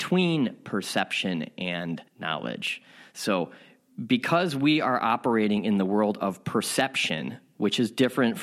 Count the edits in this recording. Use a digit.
1